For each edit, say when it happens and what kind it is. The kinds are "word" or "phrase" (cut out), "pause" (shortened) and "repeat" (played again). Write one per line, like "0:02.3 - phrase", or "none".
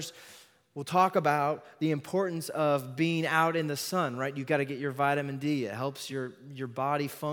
none